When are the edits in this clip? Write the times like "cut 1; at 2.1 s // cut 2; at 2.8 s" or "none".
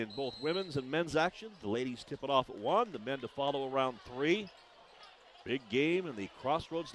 none